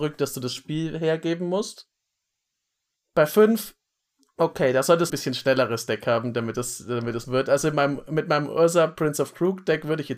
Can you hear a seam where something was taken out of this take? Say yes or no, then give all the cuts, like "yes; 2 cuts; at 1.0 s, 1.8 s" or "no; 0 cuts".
yes; 2 cuts; at 5.1 s, 7.2 s